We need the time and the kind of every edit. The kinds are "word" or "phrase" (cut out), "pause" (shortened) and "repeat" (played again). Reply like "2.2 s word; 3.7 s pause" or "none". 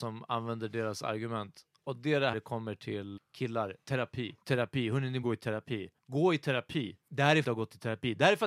2.3 s phrase; 3.2 s word; 4.4 s pause; 5.2 s word; 6.0 s pause; 7.0 s pause; 7.4 s phrase